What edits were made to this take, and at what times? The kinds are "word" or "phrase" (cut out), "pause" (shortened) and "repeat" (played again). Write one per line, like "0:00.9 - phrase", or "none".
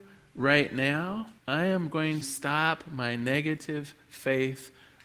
0:01.4 - pause
0:02.2 - word